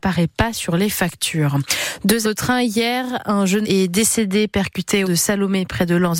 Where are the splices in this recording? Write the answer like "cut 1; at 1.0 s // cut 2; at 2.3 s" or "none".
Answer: cut 1; at 2.2 s // cut 2; at 3.6 s // cut 3; at 5.0 s